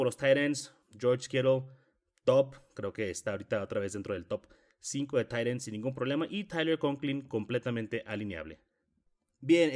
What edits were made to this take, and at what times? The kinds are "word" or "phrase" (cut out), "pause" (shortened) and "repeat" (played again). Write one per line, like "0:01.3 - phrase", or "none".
none